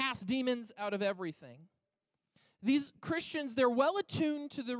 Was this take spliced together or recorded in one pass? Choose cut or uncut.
uncut